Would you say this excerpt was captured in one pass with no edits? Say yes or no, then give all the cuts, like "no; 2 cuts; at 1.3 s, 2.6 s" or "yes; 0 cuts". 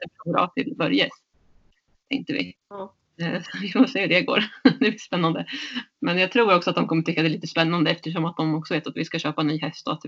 yes; 0 cuts